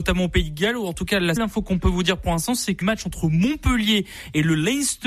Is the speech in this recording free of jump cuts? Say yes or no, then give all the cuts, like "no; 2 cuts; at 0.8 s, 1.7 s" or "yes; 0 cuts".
no; 2 cuts; at 1.4 s, 2.8 s